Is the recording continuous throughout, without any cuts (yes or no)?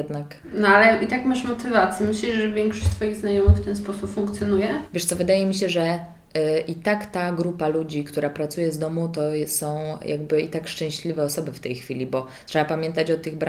yes